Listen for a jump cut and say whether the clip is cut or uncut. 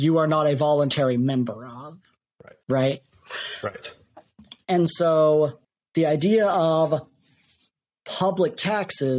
cut